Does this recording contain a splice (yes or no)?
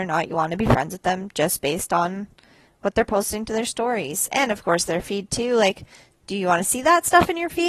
no